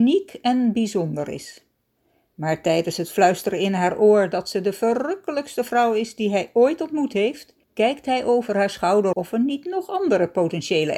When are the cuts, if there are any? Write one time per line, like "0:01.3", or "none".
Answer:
0:07.6
0:09.1